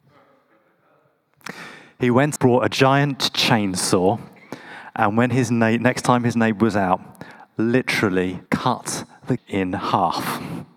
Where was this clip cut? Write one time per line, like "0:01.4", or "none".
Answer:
0:02.4
0:08.5
0:09.4